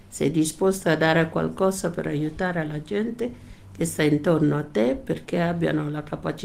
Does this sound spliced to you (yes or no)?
no